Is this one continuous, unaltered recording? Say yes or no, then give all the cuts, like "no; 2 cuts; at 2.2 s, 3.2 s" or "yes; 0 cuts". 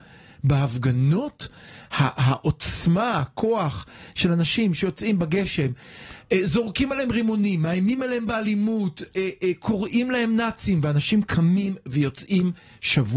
yes; 0 cuts